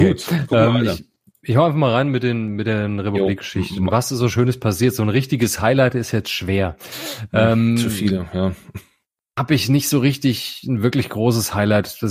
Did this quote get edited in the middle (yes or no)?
no